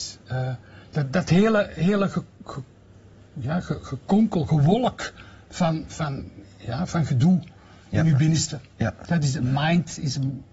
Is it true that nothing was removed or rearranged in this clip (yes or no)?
yes